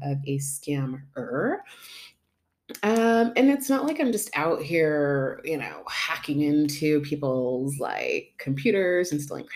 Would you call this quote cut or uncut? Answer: uncut